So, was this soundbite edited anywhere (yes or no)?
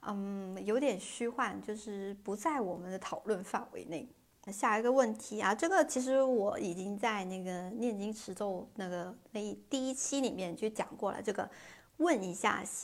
no